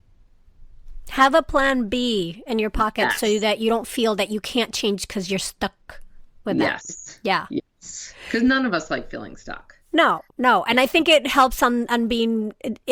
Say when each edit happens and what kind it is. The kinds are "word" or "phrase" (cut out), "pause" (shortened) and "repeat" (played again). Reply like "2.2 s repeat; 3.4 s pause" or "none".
10.3 s pause

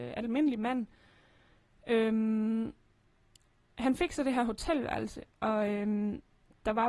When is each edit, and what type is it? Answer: none

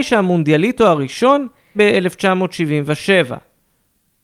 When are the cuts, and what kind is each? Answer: 1.7 s word

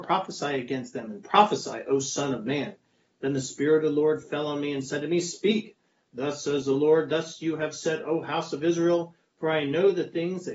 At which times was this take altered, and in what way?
none

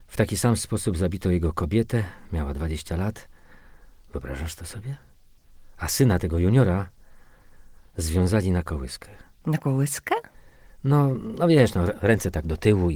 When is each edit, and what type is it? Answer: none

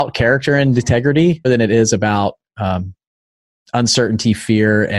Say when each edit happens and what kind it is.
1.4 s word

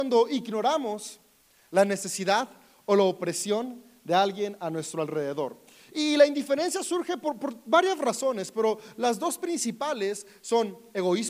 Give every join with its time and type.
none

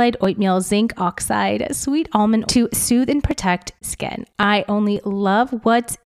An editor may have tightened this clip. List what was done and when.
2.4 s word; 3.8 s word; 4.7 s word

